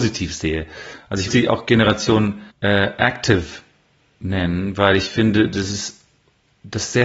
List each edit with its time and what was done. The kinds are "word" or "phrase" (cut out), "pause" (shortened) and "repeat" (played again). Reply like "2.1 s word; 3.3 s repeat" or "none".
1.3 s word; 2.5 s pause